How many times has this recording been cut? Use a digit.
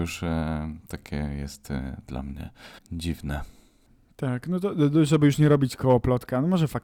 1